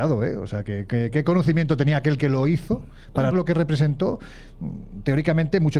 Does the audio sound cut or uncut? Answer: cut